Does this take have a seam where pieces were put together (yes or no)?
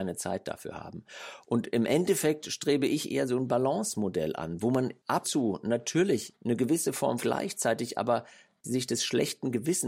yes